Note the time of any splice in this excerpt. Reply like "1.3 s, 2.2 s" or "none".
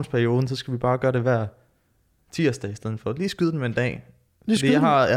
none